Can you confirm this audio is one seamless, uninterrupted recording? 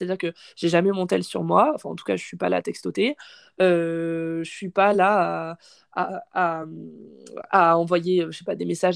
yes; 0 cuts

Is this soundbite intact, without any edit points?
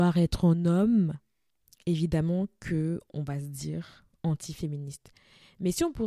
no; 2 cuts; at 1.5 s, 4.1 s

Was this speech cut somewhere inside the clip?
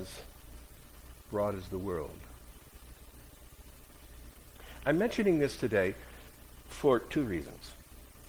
no; 0 cuts

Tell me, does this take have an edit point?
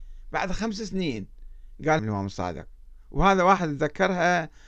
yes; 1 cut; at 2.0 s

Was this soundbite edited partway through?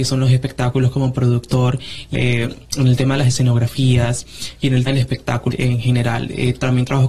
yes; 3 cuts; at 2.1 s, 4.9 s, 5.5 s

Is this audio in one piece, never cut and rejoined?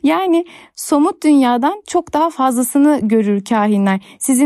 yes; 0 cuts

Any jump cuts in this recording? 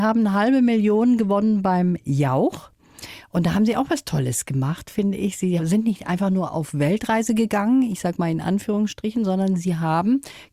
no; 0 cuts

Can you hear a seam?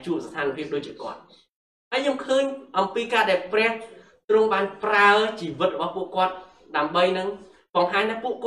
no; 0 cuts

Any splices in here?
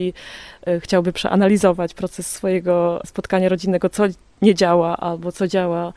no; 0 cuts

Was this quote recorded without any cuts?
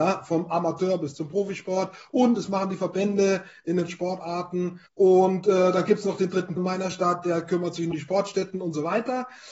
no; 4 cuts; at 3.9 s, 4.9 s, 6.6 s, 7.9 s

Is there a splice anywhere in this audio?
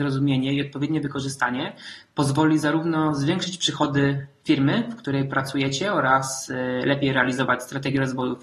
no; 0 cuts

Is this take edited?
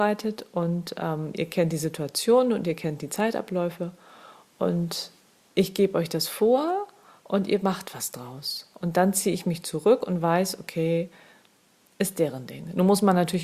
yes; 1 cut; at 5.2 s

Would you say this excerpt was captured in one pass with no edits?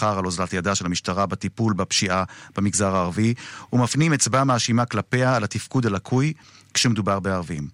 yes; 0 cuts

